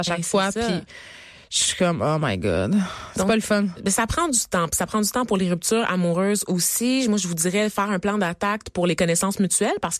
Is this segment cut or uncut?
uncut